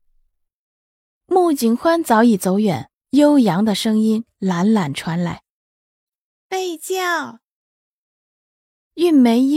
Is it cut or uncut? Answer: cut